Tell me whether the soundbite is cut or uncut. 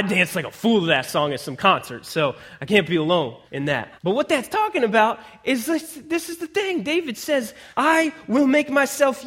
cut